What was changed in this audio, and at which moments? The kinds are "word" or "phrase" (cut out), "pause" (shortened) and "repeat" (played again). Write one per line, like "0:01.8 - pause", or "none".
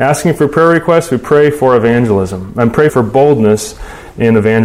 0:02.9 - word